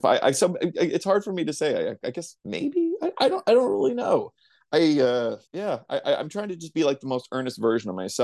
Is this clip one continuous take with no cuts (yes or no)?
no